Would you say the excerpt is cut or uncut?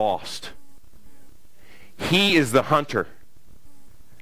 uncut